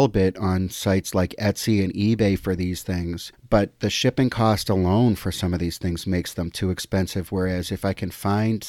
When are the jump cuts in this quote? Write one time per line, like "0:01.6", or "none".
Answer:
0:03.3